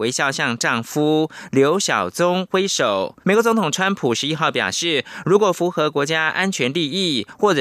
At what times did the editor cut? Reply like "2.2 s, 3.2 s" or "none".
3.2 s